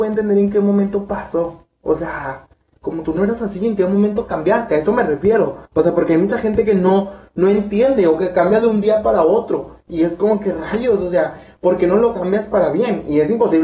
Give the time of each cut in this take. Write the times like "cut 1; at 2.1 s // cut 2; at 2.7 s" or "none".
cut 1; at 3.0 s // cut 2; at 5.7 s